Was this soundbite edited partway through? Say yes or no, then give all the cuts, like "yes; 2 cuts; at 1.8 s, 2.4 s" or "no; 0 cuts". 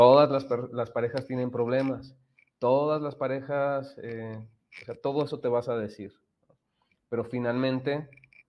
no; 0 cuts